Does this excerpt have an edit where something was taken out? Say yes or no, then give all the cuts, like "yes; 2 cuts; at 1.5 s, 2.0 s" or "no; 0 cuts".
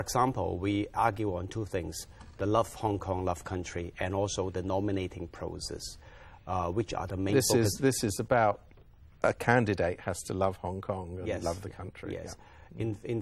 yes; 1 cut; at 0.9 s